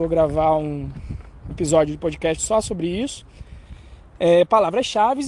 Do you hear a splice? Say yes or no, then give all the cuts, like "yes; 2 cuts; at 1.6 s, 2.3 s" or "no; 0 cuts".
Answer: yes; 1 cut; at 1.5 s